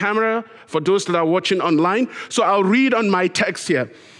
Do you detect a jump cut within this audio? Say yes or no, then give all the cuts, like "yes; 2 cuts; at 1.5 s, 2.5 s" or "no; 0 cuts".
no; 0 cuts